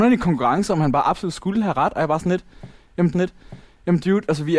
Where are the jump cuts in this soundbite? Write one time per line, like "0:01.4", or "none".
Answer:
0:03.1